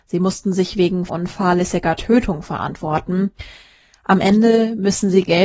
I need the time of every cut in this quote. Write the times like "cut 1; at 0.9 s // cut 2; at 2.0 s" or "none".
cut 1; at 1.1 s